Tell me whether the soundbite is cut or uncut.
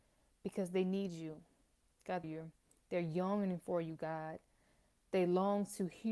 cut